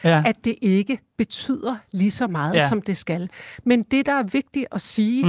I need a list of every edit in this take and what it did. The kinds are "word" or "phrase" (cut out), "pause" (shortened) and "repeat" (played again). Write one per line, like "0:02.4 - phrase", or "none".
none